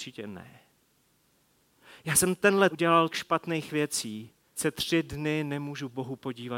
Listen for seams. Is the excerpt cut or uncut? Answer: cut